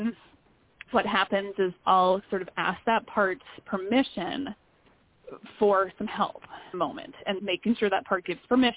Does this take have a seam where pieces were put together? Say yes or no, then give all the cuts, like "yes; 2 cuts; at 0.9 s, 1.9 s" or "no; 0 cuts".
yes; 4 cuts; at 1.8 s, 2.5 s, 6.7 s, 7.4 s